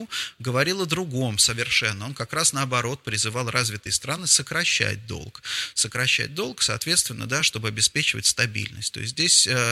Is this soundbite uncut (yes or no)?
yes